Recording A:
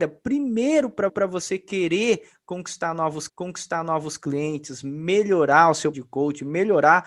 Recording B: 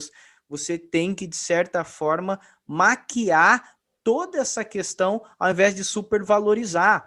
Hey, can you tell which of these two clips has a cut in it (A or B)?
A